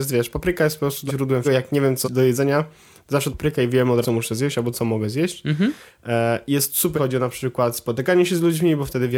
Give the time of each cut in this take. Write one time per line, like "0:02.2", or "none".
0:01.1
0:01.4
0:02.0
0:03.3
0:04.0
0:04.7
0:07.0